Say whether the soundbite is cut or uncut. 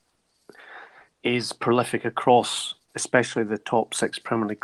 uncut